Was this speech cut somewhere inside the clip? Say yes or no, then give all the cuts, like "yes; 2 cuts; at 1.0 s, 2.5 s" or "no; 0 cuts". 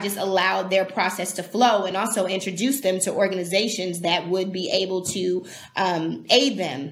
no; 0 cuts